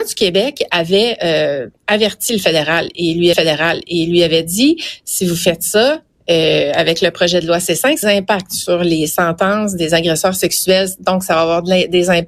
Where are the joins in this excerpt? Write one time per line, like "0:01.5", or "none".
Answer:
0:01.8
0:03.3
0:08.0